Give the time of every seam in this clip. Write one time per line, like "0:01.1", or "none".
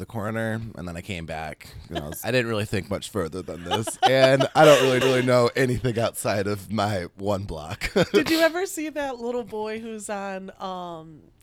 0:02.2
0:05.0